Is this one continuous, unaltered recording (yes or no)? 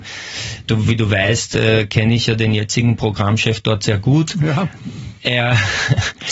yes